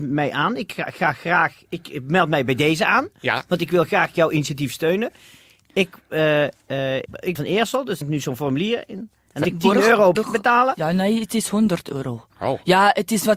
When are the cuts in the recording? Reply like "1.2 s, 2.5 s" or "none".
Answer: 7.0 s, 7.3 s, 8.0 s, 9.4 s, 10.1 s, 12.3 s